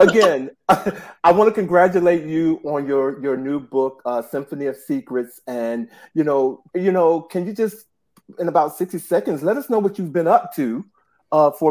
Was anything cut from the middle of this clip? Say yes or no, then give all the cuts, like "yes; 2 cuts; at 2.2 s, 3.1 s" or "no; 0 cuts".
yes; 1 cut; at 6.7 s